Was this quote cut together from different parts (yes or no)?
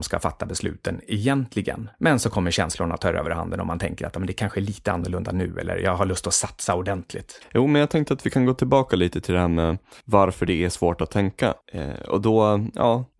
no